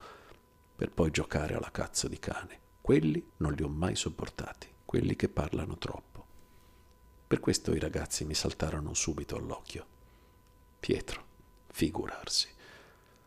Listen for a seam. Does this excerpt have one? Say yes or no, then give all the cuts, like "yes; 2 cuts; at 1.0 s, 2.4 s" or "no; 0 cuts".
yes; 2 cuts; at 3.3 s, 4.8 s